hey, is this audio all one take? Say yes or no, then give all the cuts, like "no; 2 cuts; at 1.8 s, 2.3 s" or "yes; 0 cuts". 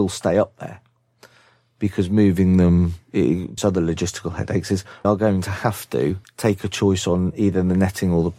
no; 3 cuts; at 3.6 s, 5.0 s, 6.2 s